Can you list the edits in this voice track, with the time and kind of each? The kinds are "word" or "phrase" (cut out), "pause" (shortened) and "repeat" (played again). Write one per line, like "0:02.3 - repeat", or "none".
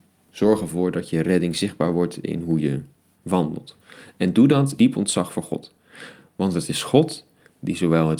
0:03.1 - word
0:04.8 - word